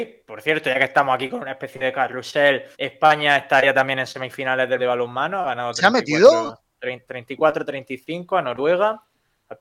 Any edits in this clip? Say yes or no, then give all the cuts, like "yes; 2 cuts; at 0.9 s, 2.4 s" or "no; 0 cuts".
yes; 2 cuts; at 2.7 s, 4.8 s